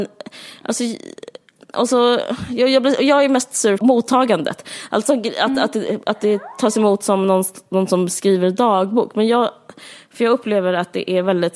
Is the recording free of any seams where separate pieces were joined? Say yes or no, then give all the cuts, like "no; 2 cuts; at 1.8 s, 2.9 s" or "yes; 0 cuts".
no; 1 cut; at 3.8 s